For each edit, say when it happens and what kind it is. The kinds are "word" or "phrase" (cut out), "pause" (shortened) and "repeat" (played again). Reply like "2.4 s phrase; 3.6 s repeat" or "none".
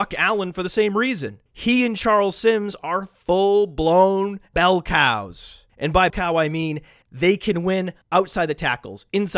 4.5 s word; 6.1 s word